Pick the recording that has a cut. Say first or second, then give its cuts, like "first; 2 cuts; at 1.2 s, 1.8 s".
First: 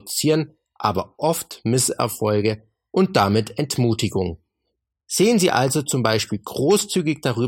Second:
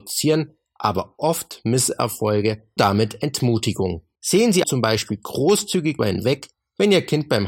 second; 4 cuts; at 2.8 s, 4.1 s, 4.6 s, 6.0 s